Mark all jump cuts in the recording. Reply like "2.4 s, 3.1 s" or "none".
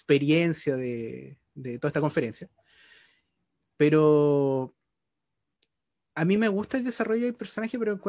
none